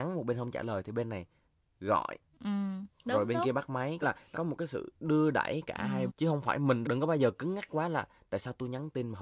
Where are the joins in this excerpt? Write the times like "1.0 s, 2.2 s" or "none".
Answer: 4.0 s, 4.3 s, 6.1 s, 6.8 s